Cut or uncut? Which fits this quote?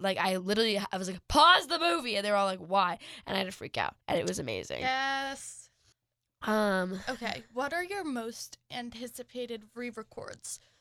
cut